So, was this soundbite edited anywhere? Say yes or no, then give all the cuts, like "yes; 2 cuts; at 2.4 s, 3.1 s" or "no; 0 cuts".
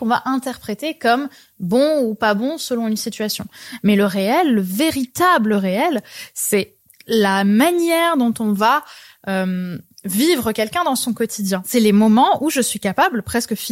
no; 0 cuts